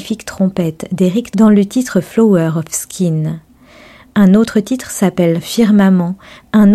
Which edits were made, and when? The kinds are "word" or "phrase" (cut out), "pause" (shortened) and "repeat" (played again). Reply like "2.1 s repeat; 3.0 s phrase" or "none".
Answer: 1.3 s word